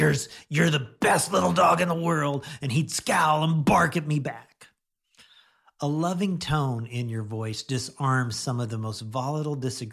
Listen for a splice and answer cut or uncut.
uncut